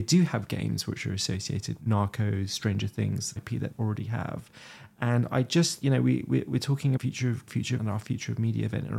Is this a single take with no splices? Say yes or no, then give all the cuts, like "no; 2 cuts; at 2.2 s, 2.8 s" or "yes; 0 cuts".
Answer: no; 7 cuts; at 1.8 s, 3.4 s, 3.7 s, 5.8 s, 7.0 s, 7.5 s, 7.8 s